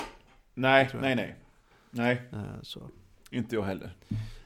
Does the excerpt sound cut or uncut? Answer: uncut